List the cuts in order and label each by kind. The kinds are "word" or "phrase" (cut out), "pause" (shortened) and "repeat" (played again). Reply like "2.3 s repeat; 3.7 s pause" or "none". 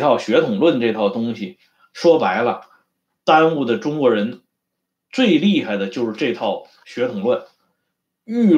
none